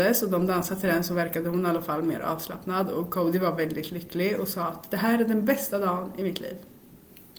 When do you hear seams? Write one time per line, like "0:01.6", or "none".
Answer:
none